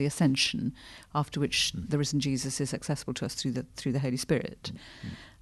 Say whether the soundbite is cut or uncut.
uncut